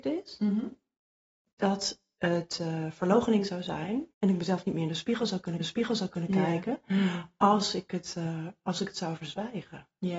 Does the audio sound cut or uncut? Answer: cut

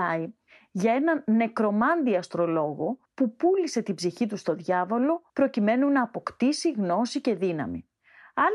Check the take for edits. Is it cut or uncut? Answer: cut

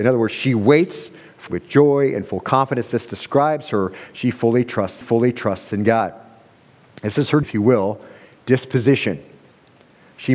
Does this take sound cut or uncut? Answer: cut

